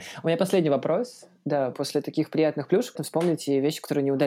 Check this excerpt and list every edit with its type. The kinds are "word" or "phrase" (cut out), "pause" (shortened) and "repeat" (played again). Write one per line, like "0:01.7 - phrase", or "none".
0:01.7 - word
0:03.0 - word